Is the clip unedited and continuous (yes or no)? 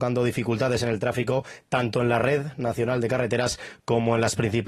yes